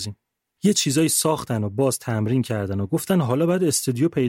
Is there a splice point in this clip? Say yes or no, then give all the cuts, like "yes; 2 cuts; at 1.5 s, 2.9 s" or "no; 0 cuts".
no; 0 cuts